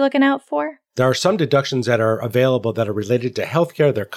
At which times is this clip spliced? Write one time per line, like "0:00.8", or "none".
none